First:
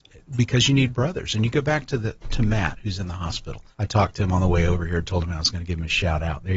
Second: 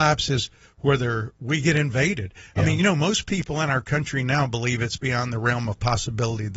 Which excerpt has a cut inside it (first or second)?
first